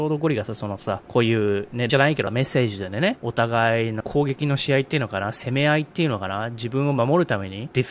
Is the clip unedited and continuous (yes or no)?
no